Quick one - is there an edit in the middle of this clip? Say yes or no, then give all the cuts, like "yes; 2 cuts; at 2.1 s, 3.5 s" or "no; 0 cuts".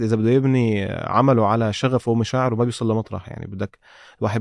no; 0 cuts